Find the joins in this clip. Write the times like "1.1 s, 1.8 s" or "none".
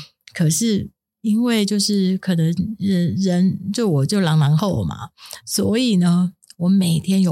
none